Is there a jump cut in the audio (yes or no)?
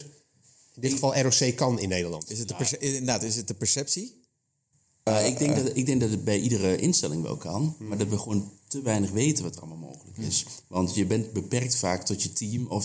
no